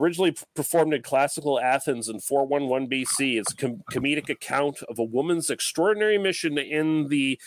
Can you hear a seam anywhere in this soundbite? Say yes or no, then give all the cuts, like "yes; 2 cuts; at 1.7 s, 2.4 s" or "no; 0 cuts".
no; 0 cuts